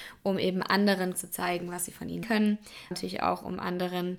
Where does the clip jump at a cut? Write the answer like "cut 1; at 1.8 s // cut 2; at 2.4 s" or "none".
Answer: cut 1; at 1.1 s // cut 2; at 2.2 s // cut 3; at 2.9 s